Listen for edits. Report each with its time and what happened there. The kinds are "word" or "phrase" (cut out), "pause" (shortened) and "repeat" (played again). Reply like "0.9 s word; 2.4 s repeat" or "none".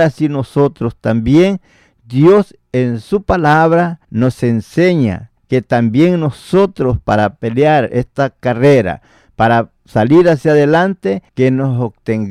4.0 s pause; 5.4 s pause; 11.3 s pause